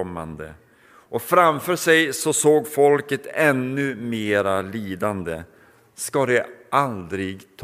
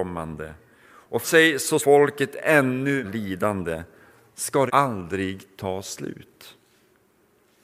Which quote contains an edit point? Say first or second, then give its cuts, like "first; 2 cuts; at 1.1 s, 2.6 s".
second; 4 cuts; at 1.2 s, 1.8 s, 3.0 s, 4.7 s